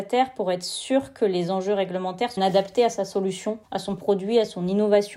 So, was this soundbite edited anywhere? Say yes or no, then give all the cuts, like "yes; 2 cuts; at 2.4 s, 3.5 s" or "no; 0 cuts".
yes; 2 cuts; at 2.4 s, 3.6 s